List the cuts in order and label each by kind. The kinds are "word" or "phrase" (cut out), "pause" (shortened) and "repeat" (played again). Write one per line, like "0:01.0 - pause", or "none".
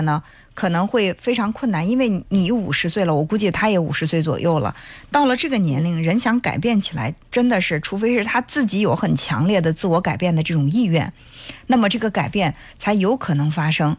0:07.2 - pause